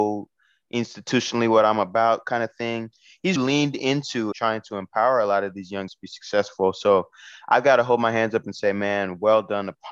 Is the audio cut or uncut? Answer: cut